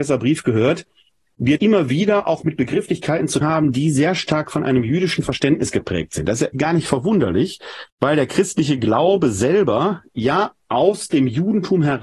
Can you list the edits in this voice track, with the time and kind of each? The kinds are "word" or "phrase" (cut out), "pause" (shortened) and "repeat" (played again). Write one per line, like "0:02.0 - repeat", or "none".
0:01.6 - word
0:03.4 - word
0:06.5 - word
0:07.9 - pause